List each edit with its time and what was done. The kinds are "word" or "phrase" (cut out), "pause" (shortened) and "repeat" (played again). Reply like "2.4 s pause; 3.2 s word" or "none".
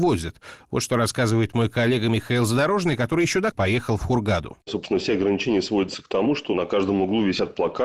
3.5 s word